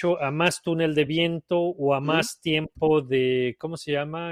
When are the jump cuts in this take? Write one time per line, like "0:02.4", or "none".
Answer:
none